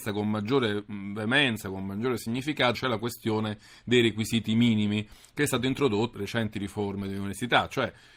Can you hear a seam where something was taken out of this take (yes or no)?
yes